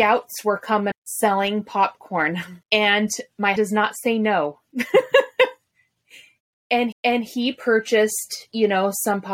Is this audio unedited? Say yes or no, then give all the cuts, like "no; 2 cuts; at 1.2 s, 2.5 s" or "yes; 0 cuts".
no; 4 cuts; at 0.9 s, 2.6 s, 3.6 s, 6.9 s